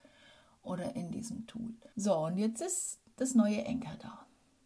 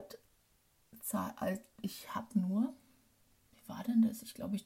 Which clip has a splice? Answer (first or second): first